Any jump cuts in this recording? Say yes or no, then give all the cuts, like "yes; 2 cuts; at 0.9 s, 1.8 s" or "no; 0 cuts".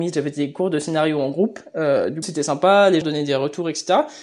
yes; 2 cuts; at 2.2 s, 3.0 s